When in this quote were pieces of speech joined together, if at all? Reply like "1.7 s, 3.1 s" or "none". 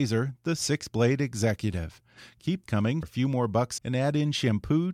2.7 s, 3.0 s, 3.8 s